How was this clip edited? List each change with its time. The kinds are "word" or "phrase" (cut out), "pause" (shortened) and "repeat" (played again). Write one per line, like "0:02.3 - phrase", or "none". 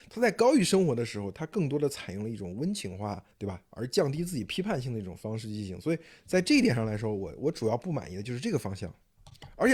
0:03.3 - pause